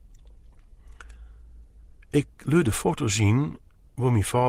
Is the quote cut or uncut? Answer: uncut